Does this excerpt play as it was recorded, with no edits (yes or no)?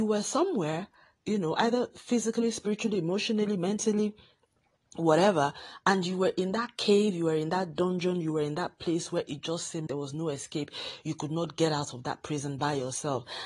no